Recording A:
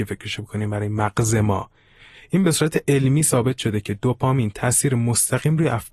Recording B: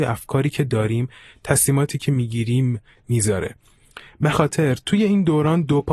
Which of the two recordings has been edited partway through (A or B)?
B